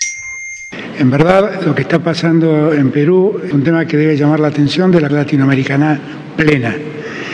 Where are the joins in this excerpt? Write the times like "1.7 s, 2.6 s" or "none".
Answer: 3.5 s, 5.1 s